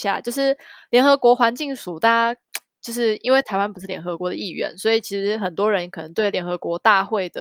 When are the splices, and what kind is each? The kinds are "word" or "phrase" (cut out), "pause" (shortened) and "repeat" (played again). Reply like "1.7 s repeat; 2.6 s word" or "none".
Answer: none